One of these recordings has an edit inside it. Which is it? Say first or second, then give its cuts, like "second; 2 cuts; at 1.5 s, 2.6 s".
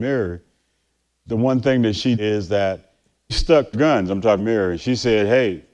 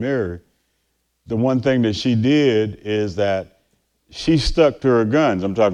first; 4 cuts; at 2.1 s, 3.3 s, 3.7 s, 4.4 s